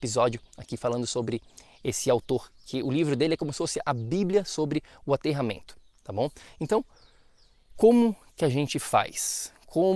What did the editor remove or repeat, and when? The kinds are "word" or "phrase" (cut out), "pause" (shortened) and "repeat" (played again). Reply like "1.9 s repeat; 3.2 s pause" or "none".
none